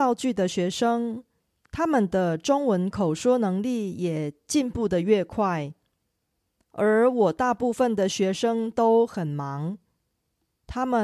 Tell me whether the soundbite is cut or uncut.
uncut